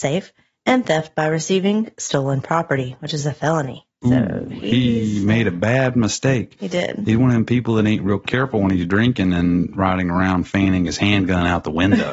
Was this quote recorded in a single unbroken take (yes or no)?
no